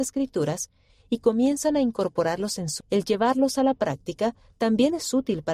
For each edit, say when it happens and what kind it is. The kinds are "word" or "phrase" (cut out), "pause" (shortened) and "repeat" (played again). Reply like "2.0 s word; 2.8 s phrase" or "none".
2.8 s word

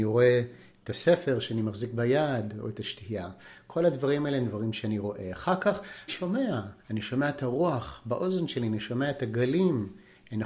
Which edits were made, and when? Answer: 6.1 s phrase; 6.8 s pause

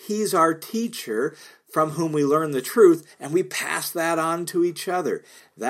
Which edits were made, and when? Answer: none

